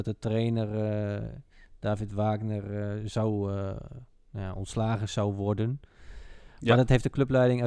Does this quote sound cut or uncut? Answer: uncut